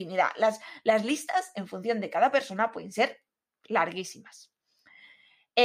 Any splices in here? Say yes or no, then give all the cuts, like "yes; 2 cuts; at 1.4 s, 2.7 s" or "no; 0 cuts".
no; 0 cuts